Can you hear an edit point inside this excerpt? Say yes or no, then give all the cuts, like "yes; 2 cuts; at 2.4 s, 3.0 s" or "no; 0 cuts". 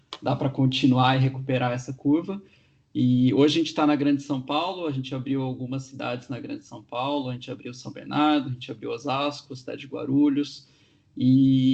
no; 0 cuts